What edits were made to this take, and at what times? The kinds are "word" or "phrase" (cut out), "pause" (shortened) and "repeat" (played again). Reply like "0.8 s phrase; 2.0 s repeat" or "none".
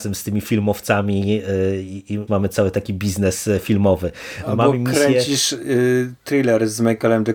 2.3 s phrase